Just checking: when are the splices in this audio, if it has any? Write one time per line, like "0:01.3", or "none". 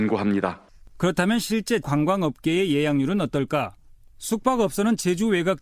0:01.8